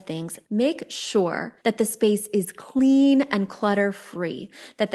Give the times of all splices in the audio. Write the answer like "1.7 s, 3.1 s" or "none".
1.6 s